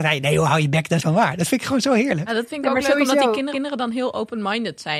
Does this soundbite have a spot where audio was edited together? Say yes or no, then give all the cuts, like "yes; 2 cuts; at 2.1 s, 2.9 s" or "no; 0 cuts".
yes; 2 cuts; at 1.0 s, 3.5 s